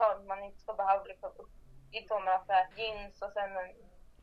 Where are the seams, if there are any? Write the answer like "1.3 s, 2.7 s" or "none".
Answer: 1.0 s, 2.1 s, 2.7 s